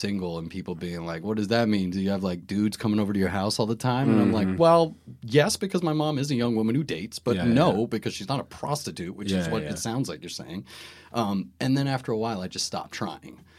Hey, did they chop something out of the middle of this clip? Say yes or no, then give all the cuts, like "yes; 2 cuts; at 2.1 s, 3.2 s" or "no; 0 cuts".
no; 0 cuts